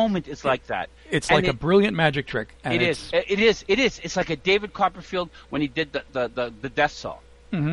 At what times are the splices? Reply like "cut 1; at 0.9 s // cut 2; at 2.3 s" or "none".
none